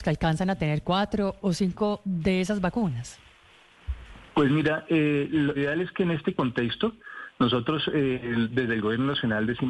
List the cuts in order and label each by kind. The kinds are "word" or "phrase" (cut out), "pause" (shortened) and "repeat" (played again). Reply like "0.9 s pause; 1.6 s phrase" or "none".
5.6 s word